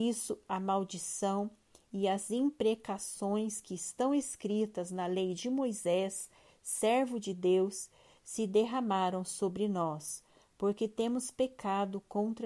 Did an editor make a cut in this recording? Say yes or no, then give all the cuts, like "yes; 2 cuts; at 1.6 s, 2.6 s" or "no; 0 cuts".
no; 0 cuts